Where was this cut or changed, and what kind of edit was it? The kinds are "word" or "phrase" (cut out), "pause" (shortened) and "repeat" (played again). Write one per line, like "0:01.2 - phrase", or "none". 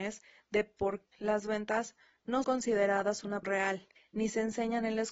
0:01.1 - word
0:02.4 - word
0:03.4 - word
0:04.0 - pause

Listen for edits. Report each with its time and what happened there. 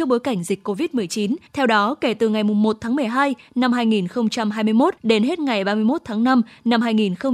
0:01.5 - pause
0:05.0 - pause

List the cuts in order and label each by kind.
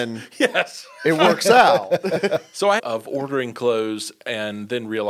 0:02.8 - phrase

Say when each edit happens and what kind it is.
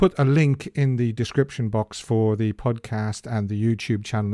none

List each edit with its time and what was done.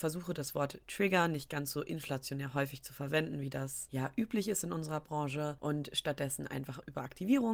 none

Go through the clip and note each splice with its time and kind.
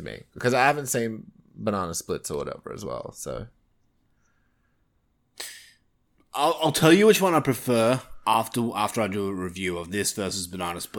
none

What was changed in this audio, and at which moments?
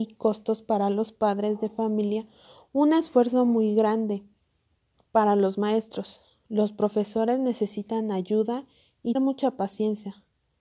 0:09.1 - word

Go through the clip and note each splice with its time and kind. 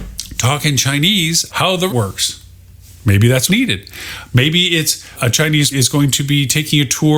0:01.5 - word
0:01.9 - word
0:03.5 - word
0:05.1 - word
0:05.7 - word

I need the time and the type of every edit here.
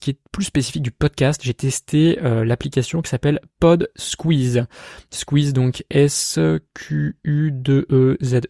none

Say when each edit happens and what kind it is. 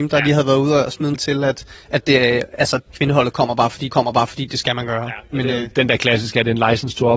0:01.1 - word
0:02.9 - word
0:03.9 - repeat

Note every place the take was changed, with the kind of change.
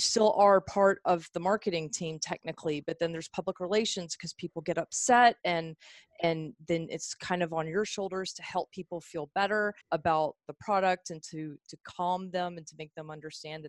0:09.8 - pause

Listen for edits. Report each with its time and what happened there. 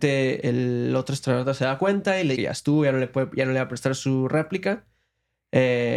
0:02.4 - word

